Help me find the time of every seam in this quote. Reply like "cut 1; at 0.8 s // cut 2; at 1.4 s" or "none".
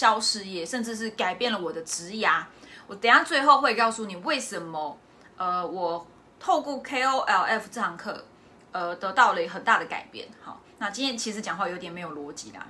none

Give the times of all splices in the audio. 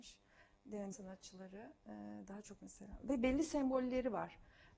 cut 1; at 0.9 s // cut 2; at 2.6 s

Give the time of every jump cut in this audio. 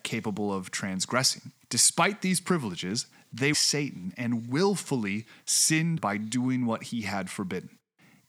cut 1; at 1.6 s // cut 2; at 3.5 s // cut 3; at 6.0 s

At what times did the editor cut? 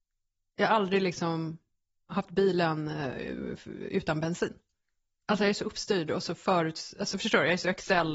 none

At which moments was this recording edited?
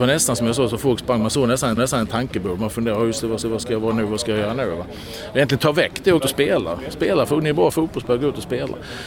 cut 1; at 1.8 s // cut 2; at 3.4 s // cut 3; at 6.2 s

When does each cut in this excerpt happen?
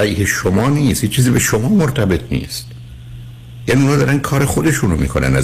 none

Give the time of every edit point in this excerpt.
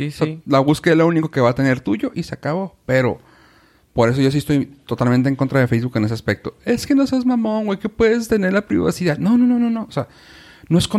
none

